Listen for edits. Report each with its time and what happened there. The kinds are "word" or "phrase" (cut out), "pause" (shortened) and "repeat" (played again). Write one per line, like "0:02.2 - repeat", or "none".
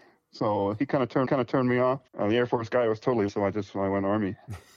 0:01.2 - repeat
0:02.1 - pause
0:03.3 - word

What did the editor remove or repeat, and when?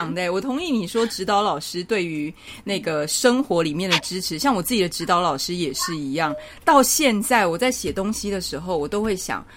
none

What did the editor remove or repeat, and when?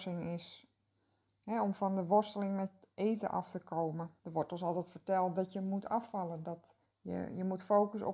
0:04.2 - pause
0:06.8 - pause

